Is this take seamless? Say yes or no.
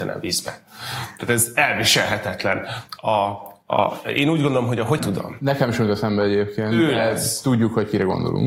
no